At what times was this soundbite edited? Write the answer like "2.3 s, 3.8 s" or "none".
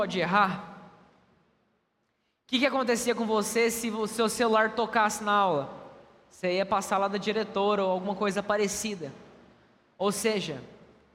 none